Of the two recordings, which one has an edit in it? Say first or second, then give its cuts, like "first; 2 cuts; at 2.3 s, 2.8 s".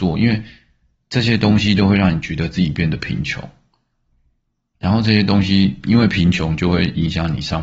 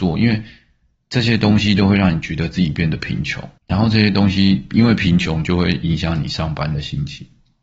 second; 1 cut; at 3.6 s